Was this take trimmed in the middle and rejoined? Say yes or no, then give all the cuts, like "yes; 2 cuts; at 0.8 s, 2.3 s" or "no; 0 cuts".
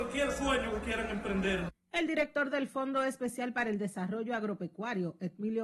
no; 0 cuts